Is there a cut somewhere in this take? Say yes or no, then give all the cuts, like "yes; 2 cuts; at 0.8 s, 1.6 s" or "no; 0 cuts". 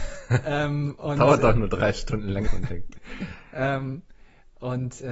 yes; 1 cut; at 2.5 s